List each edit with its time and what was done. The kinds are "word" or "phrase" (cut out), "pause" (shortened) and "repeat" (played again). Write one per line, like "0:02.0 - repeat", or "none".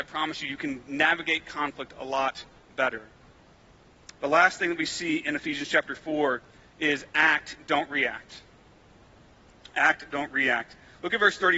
none